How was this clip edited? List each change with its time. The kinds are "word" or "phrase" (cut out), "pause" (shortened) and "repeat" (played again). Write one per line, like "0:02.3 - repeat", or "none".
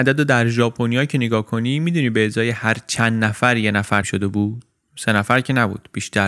0:04.0 - word